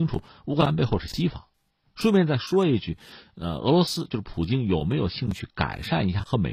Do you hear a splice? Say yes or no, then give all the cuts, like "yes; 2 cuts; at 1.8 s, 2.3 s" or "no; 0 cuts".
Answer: no; 0 cuts